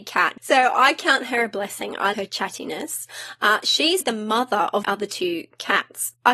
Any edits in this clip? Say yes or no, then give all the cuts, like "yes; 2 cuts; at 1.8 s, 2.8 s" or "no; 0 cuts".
yes; 3 cuts; at 2.1 s, 4.0 s, 4.8 s